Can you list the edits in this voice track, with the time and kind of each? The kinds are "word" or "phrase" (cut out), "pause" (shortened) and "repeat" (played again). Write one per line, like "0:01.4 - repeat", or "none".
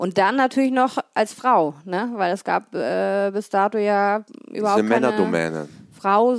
none